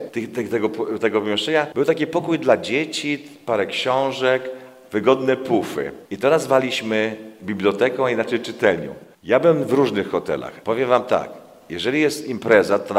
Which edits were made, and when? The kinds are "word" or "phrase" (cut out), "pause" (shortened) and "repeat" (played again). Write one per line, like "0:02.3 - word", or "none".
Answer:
none